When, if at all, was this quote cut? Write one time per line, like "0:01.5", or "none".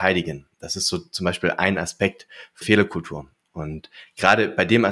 0:02.6